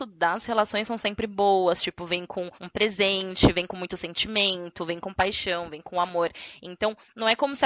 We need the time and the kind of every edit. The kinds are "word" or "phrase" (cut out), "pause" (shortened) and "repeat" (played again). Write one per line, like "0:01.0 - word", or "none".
0:02.5 - pause